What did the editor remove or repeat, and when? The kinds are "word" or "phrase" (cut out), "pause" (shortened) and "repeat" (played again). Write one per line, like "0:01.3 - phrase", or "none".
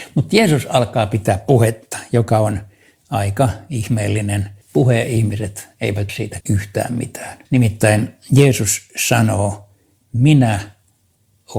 0:04.6 - pause
0:06.1 - word
0:06.4 - word
0:07.4 - pause